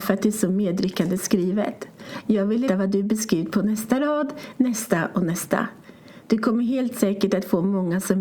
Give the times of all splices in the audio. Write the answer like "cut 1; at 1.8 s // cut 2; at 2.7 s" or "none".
cut 1; at 2.7 s

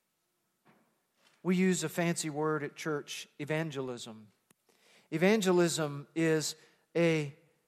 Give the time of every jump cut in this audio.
none

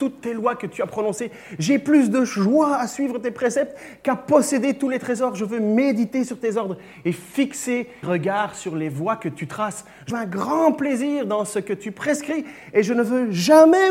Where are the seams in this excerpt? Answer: cut 1; at 8.0 s // cut 2; at 10.1 s

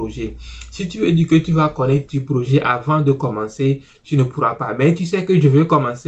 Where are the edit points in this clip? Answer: cut 1; at 2.1 s

